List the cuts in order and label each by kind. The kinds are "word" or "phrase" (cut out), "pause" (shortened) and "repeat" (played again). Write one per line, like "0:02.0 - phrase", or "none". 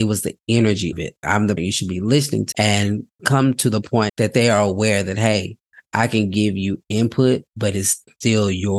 0:00.9 - word
0:01.2 - word
0:01.6 - word
0:02.5 - word
0:03.2 - word
0:04.1 - word